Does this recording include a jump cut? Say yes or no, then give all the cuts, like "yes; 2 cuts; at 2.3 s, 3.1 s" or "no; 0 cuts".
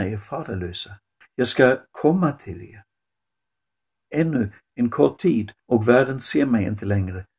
yes; 2 cuts; at 1.2 s, 5.6 s